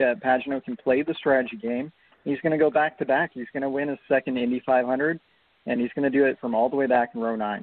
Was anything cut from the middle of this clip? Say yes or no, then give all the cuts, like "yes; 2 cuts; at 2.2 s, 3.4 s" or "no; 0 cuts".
no; 0 cuts